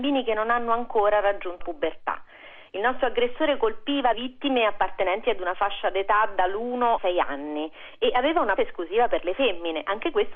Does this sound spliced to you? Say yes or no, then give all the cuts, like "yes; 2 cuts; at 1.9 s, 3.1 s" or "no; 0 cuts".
yes; 4 cuts; at 1.6 s, 4.1 s, 7.0 s, 8.6 s